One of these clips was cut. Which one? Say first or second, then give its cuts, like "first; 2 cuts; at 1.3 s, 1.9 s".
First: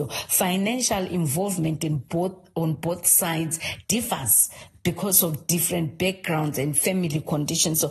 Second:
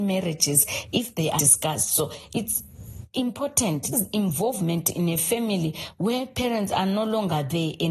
second; 2 cuts; at 1.4 s, 3.9 s